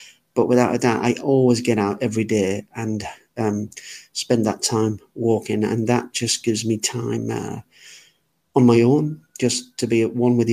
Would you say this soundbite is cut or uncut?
uncut